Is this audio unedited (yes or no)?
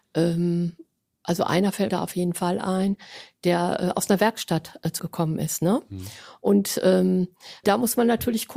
no